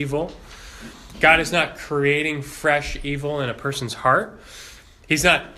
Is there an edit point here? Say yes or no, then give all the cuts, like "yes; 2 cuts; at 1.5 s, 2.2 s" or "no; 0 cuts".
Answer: no; 0 cuts